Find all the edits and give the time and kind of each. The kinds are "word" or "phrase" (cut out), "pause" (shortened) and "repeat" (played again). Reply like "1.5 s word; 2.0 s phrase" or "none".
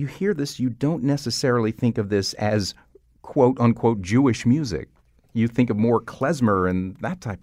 none